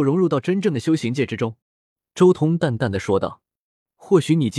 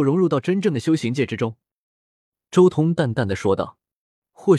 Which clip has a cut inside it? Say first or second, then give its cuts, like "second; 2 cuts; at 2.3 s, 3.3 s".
first; 1 cut; at 1.6 s